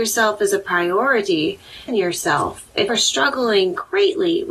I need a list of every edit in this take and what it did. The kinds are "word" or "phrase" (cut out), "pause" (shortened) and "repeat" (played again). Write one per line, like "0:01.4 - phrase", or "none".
0:01.9 - phrase
0:02.9 - word

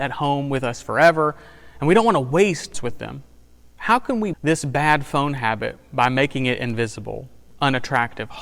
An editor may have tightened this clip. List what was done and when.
0:02.7 - phrase
0:04.3 - word

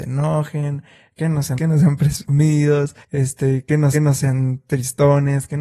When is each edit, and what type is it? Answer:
0:01.6 - word
0:03.0 - pause
0:03.9 - repeat

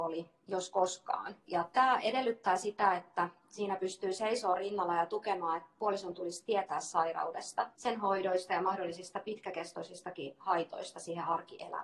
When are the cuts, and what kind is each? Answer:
0:01.4 - pause
0:07.7 - pause

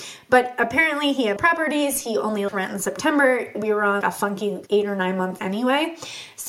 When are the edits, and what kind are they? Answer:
0:01.4 - word
0:02.5 - word
0:03.5 - word
0:04.0 - word
0:04.7 - word
0:05.4 - word

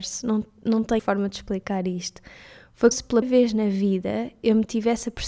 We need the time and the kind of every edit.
0:01.0 - word
0:02.9 - word
0:03.2 - word

